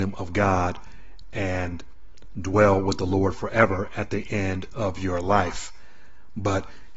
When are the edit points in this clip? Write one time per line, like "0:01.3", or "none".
none